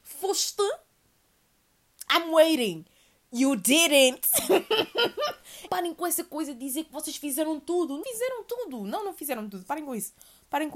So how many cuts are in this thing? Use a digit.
2